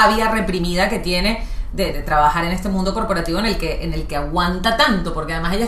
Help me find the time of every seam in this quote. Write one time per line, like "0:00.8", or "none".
0:01.9